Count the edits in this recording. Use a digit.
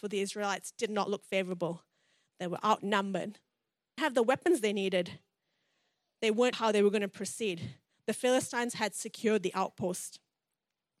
2